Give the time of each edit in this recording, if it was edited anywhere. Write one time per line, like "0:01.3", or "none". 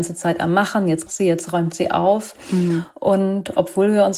0:01.1